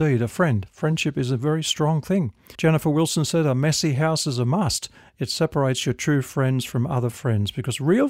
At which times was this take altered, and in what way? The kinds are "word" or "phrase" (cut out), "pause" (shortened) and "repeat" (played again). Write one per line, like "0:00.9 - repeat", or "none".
0:02.5 - pause
0:04.9 - pause